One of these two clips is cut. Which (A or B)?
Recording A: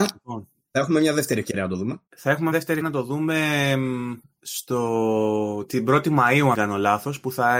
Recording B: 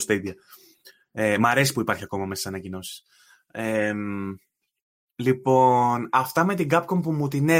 A